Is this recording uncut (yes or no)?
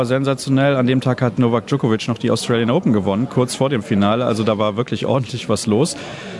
yes